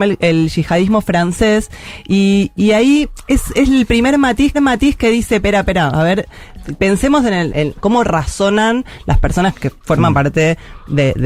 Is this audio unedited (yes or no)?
no